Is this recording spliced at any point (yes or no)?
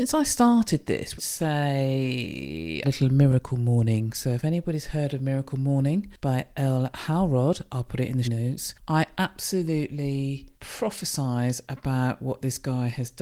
yes